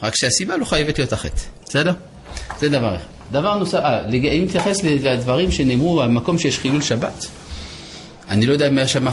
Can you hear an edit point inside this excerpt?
yes; 1 cut; at 1.6 s

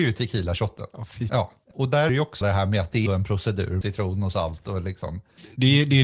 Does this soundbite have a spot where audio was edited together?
yes; 6 cuts; at 1.3 s, 1.7 s, 2.1 s, 2.4 s, 3.1 s, 3.8 s

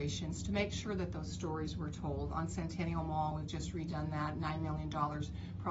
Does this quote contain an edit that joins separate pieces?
no; 0 cuts

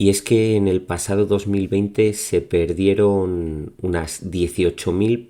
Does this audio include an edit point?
no; 0 cuts

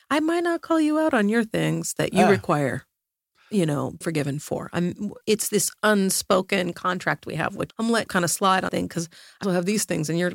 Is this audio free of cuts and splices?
no; 6 cuts; at 4.0 s, 5.2 s, 7.7 s, 8.1 s, 8.7 s, 9.4 s

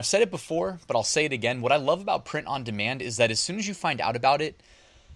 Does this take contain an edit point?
no; 0 cuts

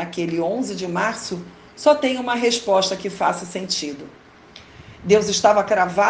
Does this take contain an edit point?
no; 0 cuts

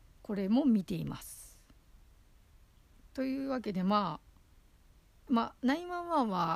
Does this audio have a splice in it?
yes; 1 cut; at 5.3 s

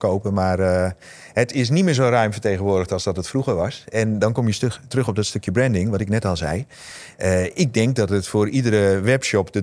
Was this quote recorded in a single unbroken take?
yes; 0 cuts

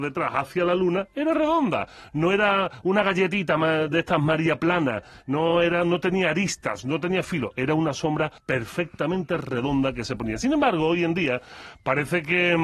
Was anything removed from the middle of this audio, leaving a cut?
yes; 1 cut; at 8.4 s

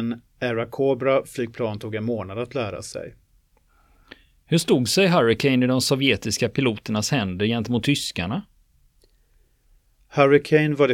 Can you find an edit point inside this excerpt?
no; 0 cuts

